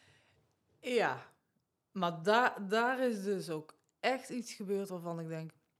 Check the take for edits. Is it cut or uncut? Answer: uncut